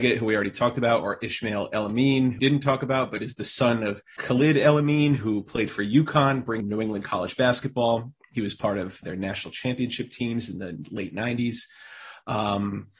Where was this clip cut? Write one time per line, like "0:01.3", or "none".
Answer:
0:02.4
0:04.2
0:06.6
0:09.0